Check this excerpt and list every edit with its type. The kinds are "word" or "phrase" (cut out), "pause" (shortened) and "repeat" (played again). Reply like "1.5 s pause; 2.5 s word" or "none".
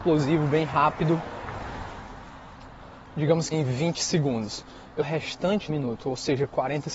3.5 s word; 5.0 s phrase; 5.7 s word